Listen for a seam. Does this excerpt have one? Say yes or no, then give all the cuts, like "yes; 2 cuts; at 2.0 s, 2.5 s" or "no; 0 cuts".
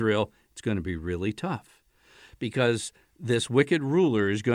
no; 0 cuts